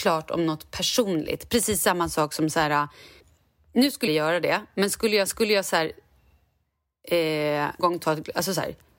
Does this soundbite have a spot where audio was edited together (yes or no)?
yes